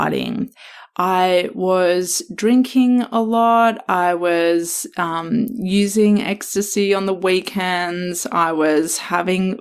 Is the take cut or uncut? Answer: uncut